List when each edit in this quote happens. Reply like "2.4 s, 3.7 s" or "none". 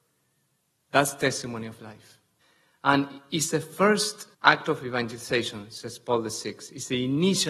2.4 s, 4.3 s